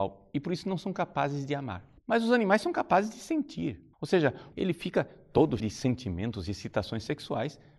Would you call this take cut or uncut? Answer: cut